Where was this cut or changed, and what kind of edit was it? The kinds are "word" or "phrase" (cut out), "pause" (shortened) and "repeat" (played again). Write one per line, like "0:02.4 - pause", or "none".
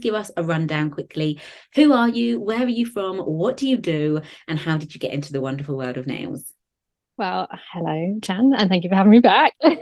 none